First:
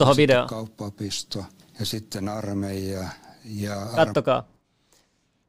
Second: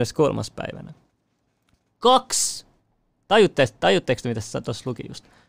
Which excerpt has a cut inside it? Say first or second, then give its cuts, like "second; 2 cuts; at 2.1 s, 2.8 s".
first; 1 cut; at 1.6 s